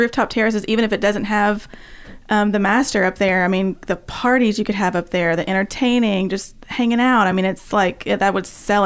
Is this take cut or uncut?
uncut